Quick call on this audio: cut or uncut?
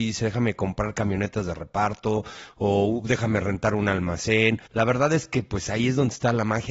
cut